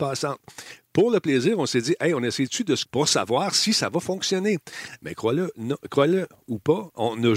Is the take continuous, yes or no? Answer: no